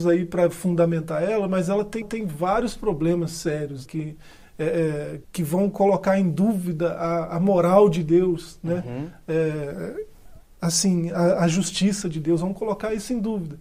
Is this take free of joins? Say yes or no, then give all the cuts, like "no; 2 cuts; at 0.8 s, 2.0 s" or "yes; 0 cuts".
no; 3 cuts; at 2.0 s, 3.9 s, 5.2 s